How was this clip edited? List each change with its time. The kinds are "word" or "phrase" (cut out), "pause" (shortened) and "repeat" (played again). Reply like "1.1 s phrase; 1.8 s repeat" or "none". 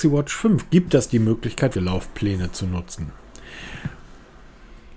1.7 s word